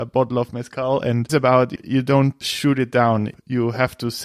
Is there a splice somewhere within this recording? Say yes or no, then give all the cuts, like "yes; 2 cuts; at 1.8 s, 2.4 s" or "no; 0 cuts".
yes; 3 cuts; at 1.3 s, 1.8 s, 2.4 s